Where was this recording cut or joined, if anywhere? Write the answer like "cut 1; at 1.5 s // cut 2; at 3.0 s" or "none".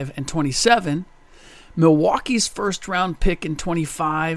none